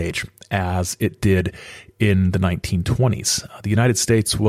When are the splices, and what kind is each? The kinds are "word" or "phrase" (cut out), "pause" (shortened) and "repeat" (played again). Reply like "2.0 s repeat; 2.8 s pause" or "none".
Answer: none